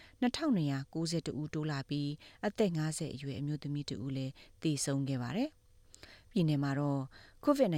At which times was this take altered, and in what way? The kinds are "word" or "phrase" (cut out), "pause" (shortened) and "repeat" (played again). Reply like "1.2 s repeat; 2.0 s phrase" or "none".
6.3 s word